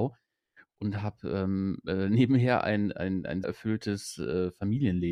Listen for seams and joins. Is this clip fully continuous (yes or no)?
no